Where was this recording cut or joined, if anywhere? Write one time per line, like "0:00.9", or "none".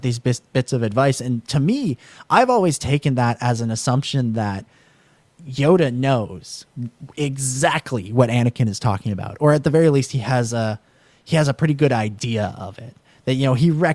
none

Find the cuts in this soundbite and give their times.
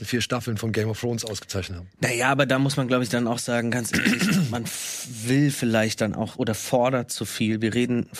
none

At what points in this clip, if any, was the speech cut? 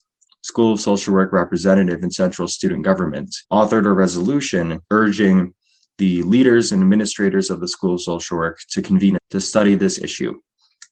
0:03.4
0:04.8
0:09.2

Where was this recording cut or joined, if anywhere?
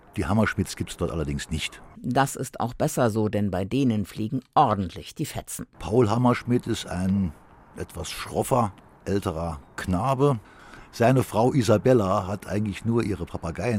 none

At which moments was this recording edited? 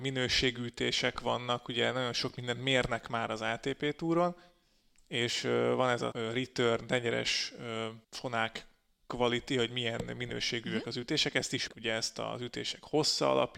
0:06.1
0:08.0
0:11.7

